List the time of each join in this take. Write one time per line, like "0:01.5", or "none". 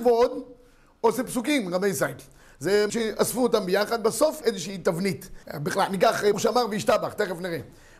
0:02.9
0:04.4
0:05.4
0:06.3